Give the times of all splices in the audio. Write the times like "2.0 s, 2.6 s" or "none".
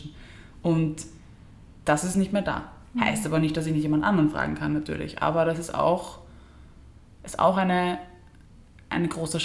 none